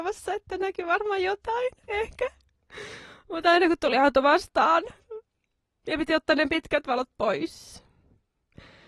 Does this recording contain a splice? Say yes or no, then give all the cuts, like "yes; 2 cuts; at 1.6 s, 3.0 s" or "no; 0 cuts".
no; 0 cuts